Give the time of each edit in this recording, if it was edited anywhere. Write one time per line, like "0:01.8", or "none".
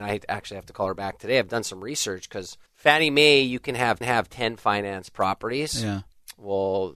0:02.7
0:04.0